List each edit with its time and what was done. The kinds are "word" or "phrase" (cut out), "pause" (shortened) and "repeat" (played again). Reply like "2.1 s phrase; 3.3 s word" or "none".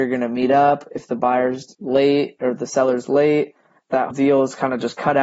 4.1 s word